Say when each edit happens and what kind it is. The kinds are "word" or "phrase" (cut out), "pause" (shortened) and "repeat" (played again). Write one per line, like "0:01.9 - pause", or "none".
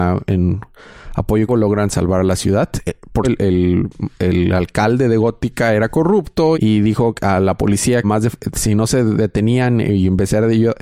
0:01.5 - word
0:03.2 - word
0:06.5 - word
0:08.0 - phrase